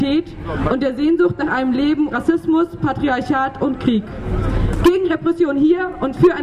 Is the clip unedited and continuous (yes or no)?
no